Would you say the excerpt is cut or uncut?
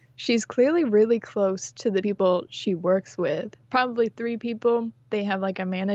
cut